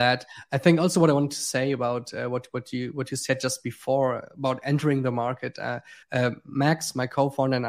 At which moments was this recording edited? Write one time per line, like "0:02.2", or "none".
0:06.0